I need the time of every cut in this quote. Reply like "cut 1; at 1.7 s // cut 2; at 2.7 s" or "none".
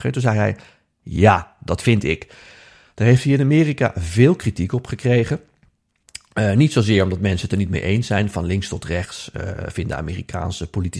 none